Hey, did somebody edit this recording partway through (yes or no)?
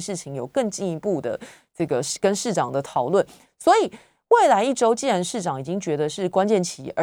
no